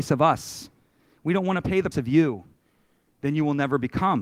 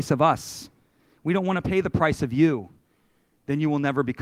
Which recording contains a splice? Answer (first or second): first